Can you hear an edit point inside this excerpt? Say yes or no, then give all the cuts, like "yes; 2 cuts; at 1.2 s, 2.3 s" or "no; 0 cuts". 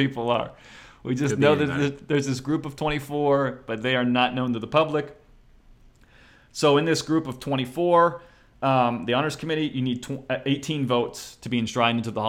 no; 0 cuts